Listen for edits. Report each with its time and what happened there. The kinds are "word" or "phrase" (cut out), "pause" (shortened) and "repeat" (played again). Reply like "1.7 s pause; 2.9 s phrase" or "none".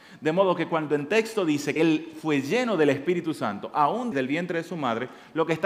1.8 s word; 4.1 s word